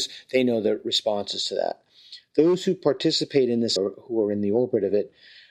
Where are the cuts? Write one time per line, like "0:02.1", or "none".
0:03.8